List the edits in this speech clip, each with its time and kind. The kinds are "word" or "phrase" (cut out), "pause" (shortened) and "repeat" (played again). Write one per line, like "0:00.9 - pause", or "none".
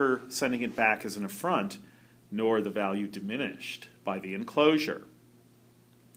none